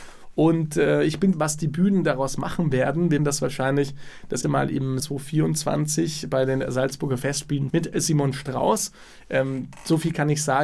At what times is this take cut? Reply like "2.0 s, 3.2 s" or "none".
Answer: 1.3 s, 3.2 s, 4.4 s, 5.0 s, 7.7 s